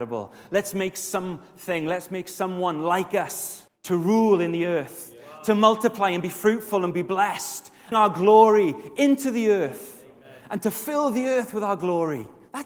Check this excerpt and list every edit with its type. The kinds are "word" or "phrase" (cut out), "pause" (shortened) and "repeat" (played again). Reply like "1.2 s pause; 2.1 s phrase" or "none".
3.7 s pause; 7.9 s phrase